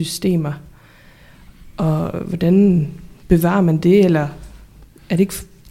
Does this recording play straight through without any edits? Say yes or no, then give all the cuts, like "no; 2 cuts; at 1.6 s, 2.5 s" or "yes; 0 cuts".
yes; 0 cuts